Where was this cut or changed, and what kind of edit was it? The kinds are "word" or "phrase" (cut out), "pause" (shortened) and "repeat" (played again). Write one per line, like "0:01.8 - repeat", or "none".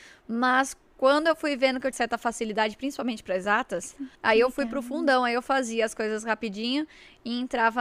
0:01.9 - word
0:04.1 - pause